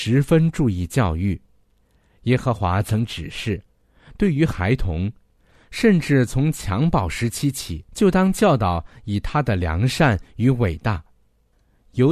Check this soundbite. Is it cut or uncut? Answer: cut